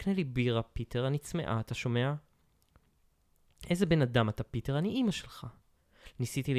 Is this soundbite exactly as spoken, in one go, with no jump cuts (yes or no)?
yes